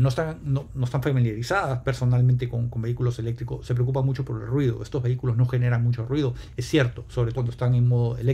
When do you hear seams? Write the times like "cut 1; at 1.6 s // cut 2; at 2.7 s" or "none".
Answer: cut 1; at 7.3 s